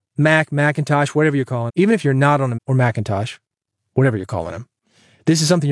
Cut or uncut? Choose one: cut